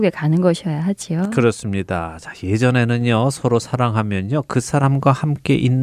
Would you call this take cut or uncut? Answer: uncut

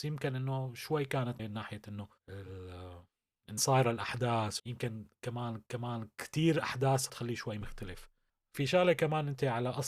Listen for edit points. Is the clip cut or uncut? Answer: cut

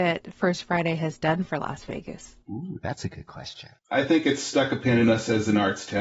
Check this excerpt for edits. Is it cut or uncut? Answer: cut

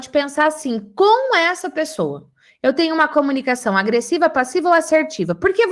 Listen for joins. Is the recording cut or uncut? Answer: uncut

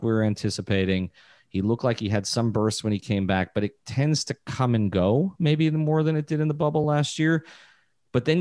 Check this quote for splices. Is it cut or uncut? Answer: uncut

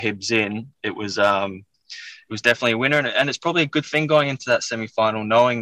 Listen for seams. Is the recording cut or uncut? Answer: uncut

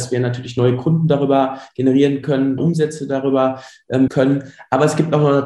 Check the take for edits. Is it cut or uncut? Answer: cut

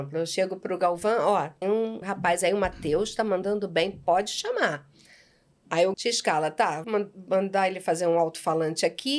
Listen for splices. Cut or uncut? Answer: cut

